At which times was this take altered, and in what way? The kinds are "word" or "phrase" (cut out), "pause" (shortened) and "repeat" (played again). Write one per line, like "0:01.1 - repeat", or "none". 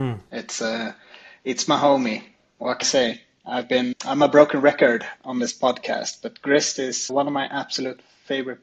0:02.8 - word
0:03.9 - word
0:07.1 - word